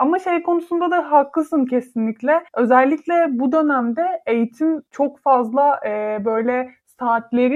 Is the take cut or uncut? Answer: cut